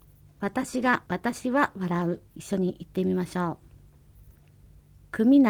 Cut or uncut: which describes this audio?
cut